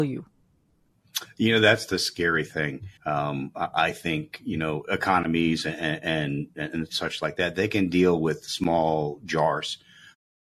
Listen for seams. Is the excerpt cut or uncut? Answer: cut